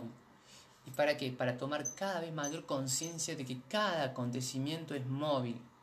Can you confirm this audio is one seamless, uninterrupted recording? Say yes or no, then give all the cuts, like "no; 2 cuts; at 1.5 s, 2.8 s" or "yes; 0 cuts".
yes; 0 cuts